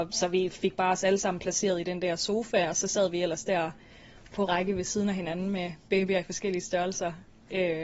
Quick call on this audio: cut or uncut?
cut